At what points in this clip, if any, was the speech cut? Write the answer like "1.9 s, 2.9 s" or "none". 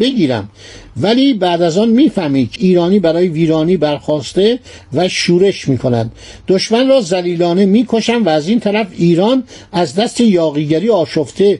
2.6 s